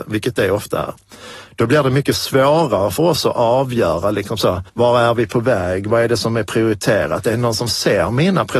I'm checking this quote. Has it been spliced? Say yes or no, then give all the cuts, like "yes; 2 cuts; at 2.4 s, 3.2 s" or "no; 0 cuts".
yes; 1 cut; at 4.7 s